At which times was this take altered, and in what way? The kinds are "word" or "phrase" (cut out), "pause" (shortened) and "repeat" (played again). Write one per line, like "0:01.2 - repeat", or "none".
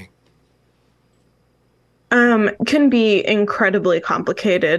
0:02.6 - word